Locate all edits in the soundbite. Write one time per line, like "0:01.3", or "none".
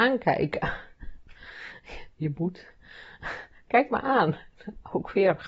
none